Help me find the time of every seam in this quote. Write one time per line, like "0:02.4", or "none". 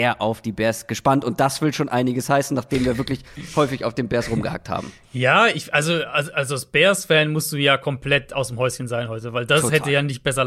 none